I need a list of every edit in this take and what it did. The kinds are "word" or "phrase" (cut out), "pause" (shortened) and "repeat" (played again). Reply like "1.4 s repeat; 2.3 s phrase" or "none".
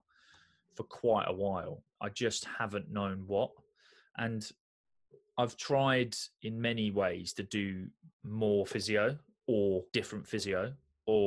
1.9 s word; 8.1 s pause; 9.9 s pause